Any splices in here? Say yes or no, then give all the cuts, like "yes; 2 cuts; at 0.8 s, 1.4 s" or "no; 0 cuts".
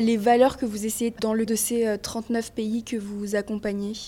yes; 2 cuts; at 1.2 s, 1.5 s